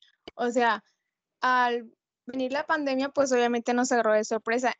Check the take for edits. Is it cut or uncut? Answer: uncut